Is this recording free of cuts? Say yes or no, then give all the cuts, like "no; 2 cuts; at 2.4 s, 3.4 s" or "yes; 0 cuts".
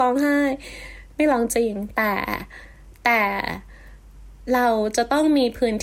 yes; 0 cuts